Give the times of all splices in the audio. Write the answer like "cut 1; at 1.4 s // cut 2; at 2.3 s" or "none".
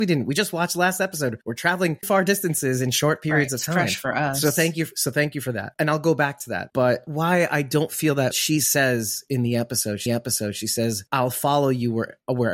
cut 1; at 2.0 s // cut 2; at 8.3 s // cut 3; at 10.1 s